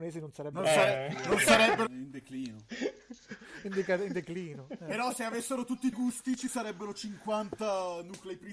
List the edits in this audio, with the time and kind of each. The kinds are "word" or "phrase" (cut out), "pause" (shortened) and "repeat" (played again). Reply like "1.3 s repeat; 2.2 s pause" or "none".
1.9 s word; 5.9 s word